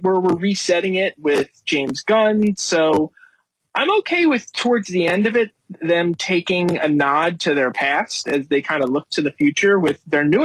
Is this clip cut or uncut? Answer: uncut